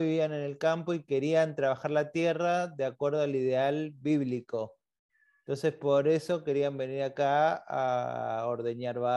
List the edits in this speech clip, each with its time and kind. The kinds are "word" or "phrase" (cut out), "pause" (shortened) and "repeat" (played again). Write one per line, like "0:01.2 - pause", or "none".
none